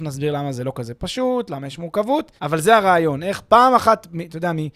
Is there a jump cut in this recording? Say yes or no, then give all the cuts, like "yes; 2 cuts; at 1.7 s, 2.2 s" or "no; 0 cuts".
yes; 1 cut; at 2.4 s